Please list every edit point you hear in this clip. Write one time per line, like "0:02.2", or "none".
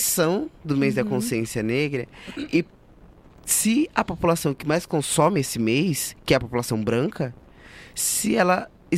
none